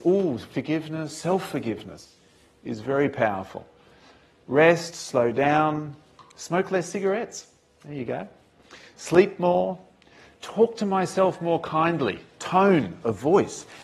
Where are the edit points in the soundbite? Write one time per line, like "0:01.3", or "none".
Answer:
none